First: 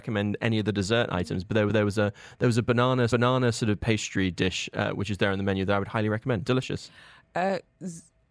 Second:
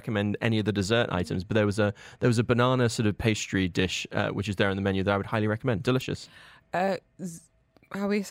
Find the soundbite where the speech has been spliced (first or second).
first